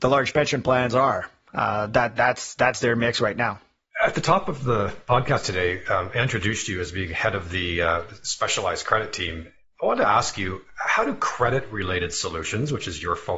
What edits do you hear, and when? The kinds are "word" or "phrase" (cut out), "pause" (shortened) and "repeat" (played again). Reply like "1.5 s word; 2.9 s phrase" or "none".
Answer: none